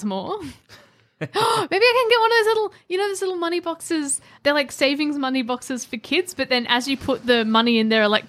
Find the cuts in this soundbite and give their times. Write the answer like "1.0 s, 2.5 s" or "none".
none